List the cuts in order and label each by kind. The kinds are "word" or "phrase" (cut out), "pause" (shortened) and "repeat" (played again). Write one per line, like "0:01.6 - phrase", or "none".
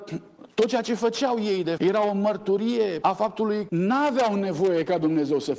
0:01.8 - word
0:03.0 - word
0:03.7 - phrase